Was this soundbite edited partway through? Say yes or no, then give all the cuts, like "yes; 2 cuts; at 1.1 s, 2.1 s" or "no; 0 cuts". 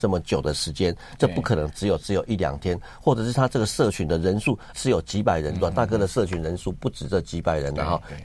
yes; 1 cut; at 4.7 s